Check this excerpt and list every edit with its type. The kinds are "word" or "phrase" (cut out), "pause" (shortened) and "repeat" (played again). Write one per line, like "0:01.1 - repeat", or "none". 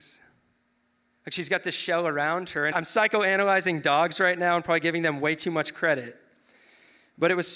0:02.7 - phrase